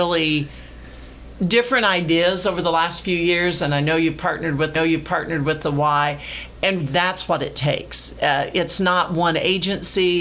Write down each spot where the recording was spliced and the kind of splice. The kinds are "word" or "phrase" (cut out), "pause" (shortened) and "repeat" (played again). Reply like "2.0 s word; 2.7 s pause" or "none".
1.3 s word; 4.8 s repeat; 6.8 s word

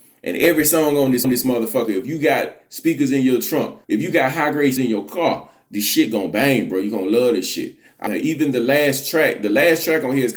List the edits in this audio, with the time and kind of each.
1.2 s repeat; 3.8 s pause; 4.8 s word; 8.1 s phrase

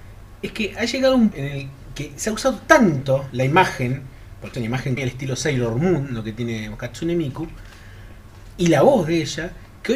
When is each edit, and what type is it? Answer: 1.3 s word; 4.5 s word; 5.0 s phrase

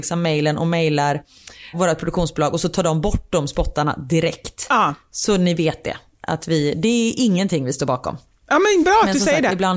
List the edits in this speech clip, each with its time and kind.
none

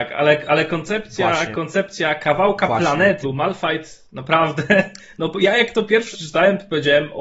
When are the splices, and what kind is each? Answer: 3.2 s word; 6.1 s word

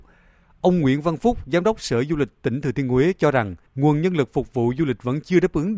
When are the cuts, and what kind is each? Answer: 3.7 s pause

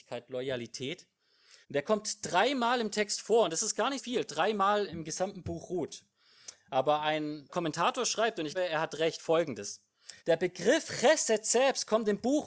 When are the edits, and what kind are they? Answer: 1.6 s pause; 4.0 s word; 4.9 s word; 7.5 s word; 8.5 s word; 10.2 s pause

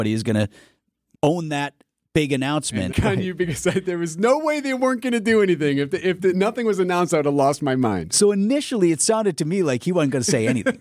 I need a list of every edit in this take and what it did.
1.2 s phrase; 2.9 s phrase

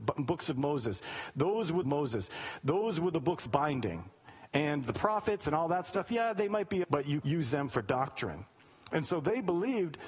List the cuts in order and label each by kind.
1.8 s repeat; 3.5 s phrase; 6.8 s word; 7.2 s phrase

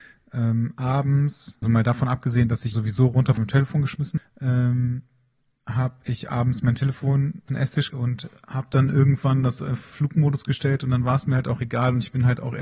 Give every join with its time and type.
1.6 s word; 2.7 s word; 3.4 s word; 4.2 s word; 7.5 s word; 7.9 s word

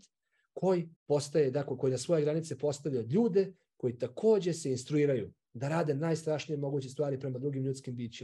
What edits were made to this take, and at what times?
1.0 s pause

